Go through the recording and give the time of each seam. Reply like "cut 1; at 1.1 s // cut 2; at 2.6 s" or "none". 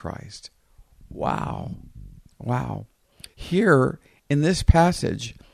cut 1; at 3.3 s